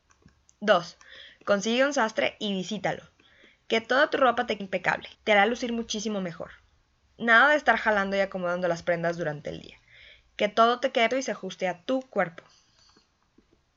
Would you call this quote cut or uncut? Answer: cut